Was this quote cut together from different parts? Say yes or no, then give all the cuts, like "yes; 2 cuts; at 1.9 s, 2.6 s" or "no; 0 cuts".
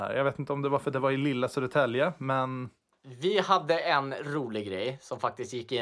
no; 0 cuts